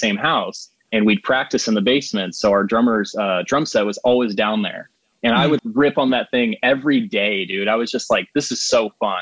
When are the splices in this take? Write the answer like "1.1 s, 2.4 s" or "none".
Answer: 5.6 s

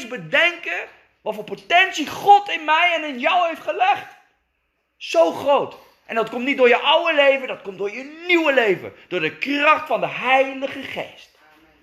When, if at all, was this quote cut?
none

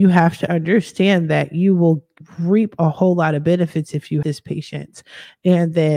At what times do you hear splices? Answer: 4.2 s

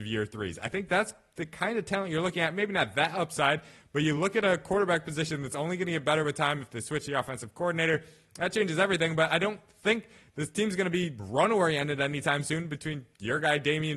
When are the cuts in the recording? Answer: none

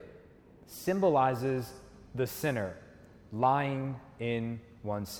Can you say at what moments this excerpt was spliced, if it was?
none

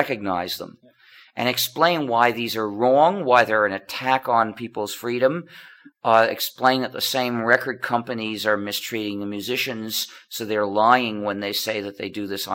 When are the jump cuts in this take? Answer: none

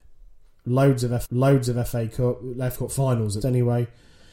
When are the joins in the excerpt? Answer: 1.2 s, 2.7 s, 3.4 s

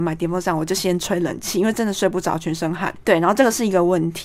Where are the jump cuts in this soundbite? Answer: none

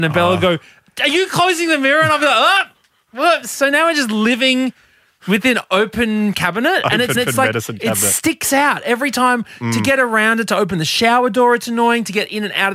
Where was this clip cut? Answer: 7.1 s

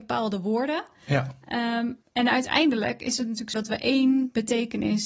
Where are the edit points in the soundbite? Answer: 2.0 s, 3.5 s

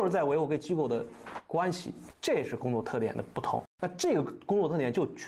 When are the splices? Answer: 3.7 s

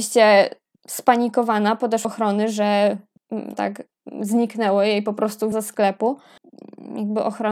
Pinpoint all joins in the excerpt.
2.0 s, 3.5 s, 5.5 s

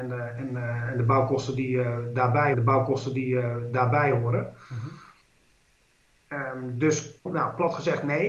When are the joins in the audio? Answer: 2.5 s, 7.2 s

